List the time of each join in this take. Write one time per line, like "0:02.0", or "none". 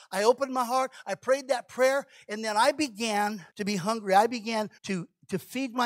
0:03.5
0:04.8